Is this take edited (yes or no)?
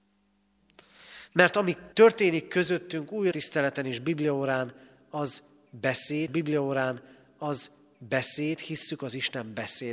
yes